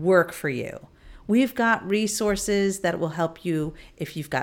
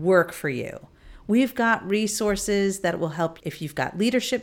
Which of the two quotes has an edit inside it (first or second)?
second